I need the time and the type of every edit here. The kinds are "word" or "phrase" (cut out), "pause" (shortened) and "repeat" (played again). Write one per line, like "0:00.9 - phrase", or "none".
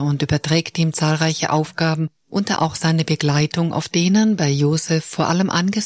0:02.6 - word
0:03.9 - phrase